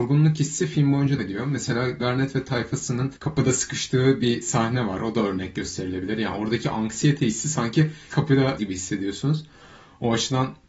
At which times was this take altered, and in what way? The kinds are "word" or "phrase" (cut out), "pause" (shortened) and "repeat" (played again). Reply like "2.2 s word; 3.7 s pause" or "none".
1.2 s word; 2.0 s word; 3.2 s pause; 8.1 s word; 8.6 s word